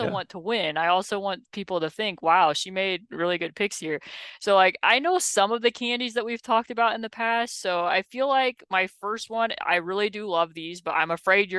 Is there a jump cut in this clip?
no; 0 cuts

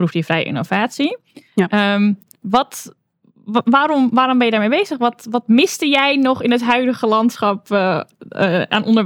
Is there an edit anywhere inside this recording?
no; 0 cuts

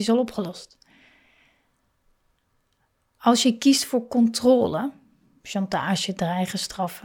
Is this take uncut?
yes; 0 cuts

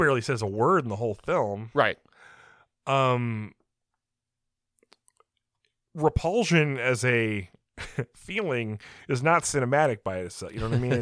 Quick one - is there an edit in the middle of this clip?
no; 0 cuts

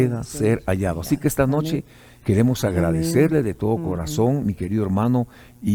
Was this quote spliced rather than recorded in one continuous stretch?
no; 0 cuts

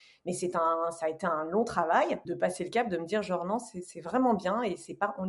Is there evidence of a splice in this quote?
yes; 1 cut; at 2.3 s

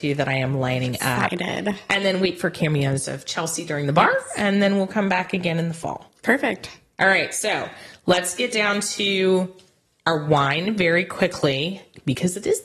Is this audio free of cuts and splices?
yes; 0 cuts

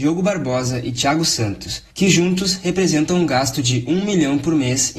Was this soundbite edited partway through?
no; 0 cuts

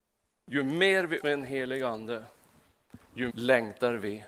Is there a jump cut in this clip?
yes; 2 cuts; at 1.2 s, 3.3 s

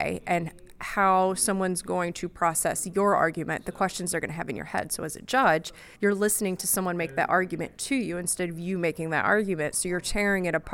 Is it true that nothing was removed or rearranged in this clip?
no; 1 cut; at 5.9 s

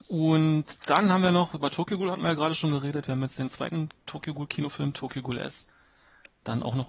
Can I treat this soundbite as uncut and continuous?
yes; 0 cuts

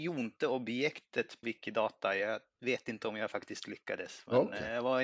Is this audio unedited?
no; 1 cut; at 1.4 s

